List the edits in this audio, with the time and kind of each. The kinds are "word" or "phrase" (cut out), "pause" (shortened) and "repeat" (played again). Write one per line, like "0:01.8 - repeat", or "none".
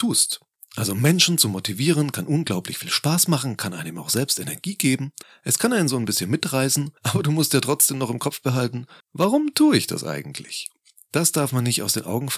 0:05.2 - pause
0:07.0 - pause
0:09.0 - pause